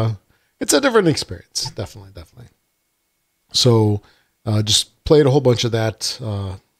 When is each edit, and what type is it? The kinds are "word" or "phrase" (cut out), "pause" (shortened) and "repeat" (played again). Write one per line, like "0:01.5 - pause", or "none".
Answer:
none